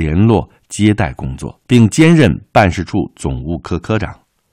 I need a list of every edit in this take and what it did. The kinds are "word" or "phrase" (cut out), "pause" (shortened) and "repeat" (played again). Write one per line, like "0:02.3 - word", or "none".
0:01.6 - pause